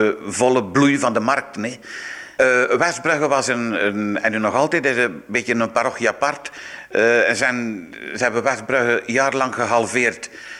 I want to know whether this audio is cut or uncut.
uncut